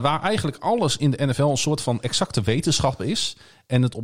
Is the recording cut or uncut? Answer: uncut